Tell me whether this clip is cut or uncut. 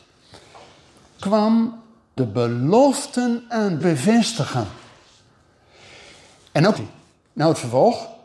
cut